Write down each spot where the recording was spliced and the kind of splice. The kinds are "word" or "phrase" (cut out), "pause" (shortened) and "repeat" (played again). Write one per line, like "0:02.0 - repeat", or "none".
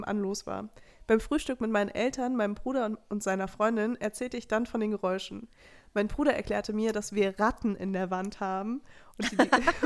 none